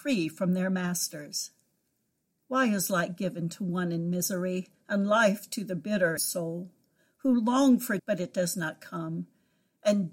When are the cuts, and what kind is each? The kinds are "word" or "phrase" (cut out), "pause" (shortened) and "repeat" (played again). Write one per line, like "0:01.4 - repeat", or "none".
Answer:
0:06.2 - word
0:08.0 - word